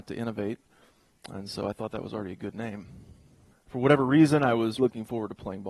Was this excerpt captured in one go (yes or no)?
no